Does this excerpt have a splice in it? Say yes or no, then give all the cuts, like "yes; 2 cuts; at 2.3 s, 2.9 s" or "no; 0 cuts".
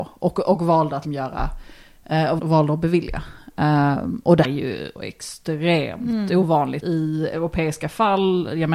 yes; 5 cuts; at 1.0 s, 2.4 s, 4.4 s, 5.0 s, 6.8 s